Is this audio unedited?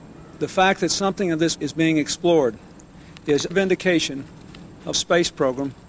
no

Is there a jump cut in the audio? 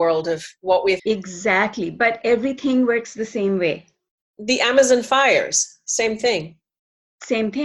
yes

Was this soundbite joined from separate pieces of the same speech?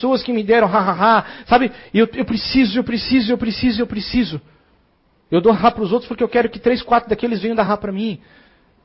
yes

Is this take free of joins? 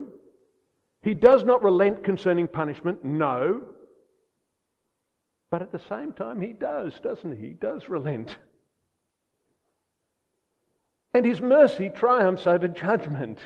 yes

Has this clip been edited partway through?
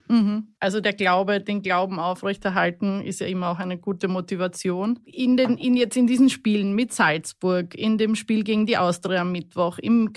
no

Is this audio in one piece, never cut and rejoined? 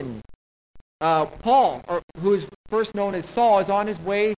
yes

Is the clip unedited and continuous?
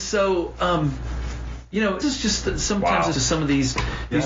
no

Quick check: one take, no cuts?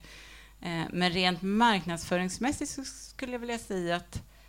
yes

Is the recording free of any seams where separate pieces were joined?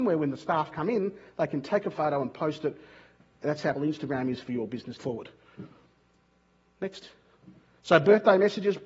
no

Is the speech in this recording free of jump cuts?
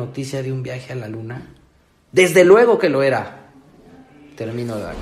yes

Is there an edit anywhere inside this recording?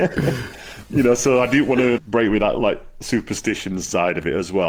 yes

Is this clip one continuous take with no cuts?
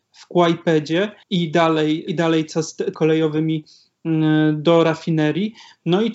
no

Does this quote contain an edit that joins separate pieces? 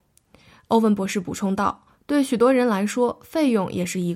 yes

